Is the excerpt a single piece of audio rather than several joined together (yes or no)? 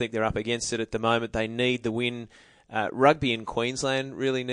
yes